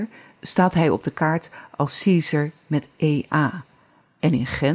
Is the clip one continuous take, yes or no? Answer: yes